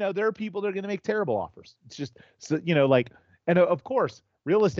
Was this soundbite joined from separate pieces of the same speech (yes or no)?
no